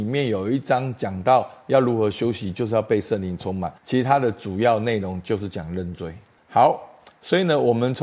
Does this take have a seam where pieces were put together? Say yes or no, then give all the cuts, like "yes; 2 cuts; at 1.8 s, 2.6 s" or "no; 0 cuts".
yes; 2 cuts; at 3.8 s, 6.4 s